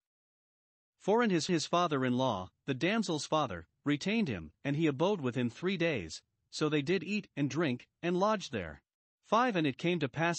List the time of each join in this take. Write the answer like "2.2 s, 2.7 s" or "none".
1.5 s, 4.6 s, 9.1 s